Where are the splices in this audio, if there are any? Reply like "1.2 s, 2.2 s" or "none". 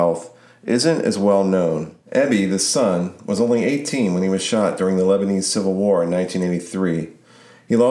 2.0 s

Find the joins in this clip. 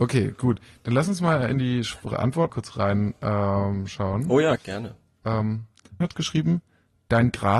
2.5 s, 4.6 s, 6.0 s

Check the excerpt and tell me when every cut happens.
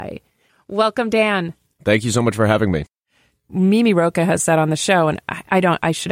none

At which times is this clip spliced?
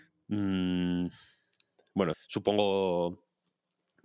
2.1 s

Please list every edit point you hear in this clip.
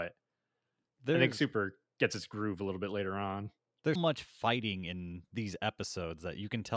4.0 s

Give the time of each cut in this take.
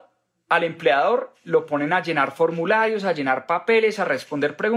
none

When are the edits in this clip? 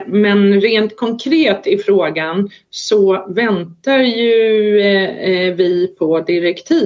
none

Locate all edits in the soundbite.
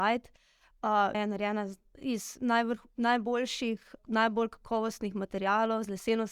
1.1 s, 4.0 s

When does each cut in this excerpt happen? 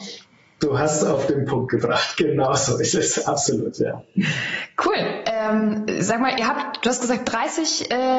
none

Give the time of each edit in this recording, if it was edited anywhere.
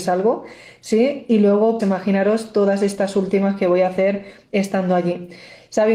1.8 s

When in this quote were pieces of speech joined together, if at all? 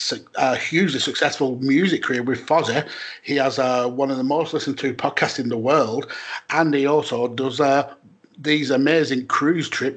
none

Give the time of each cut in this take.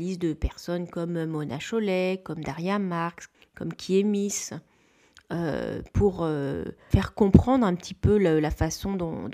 none

